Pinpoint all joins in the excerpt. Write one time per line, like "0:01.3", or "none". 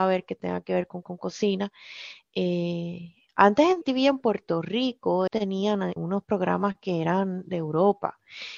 0:01.0
0:03.8
0:05.3
0:06.0